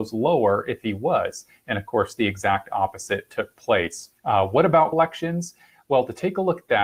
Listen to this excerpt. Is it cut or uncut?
cut